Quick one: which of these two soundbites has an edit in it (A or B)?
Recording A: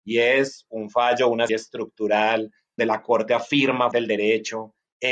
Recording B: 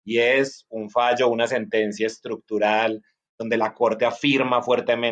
A